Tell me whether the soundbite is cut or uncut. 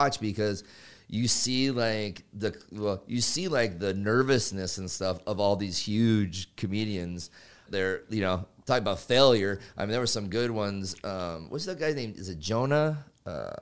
cut